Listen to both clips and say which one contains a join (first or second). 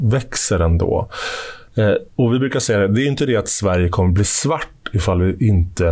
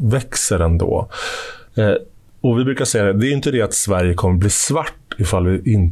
first